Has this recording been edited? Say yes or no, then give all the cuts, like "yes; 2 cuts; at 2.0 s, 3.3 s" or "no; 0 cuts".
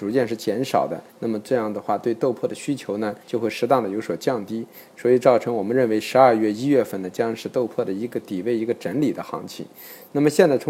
yes; 2 cuts; at 1.1 s, 3.2 s